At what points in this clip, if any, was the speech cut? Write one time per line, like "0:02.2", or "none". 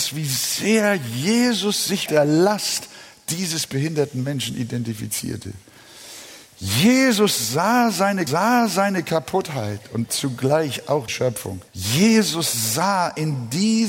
0:02.1
0:08.3
0:10.1
0:11.1
0:11.7